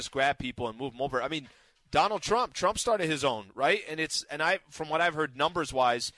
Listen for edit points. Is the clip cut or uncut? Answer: uncut